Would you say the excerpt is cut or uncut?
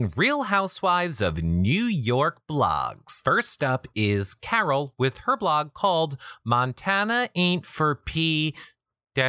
uncut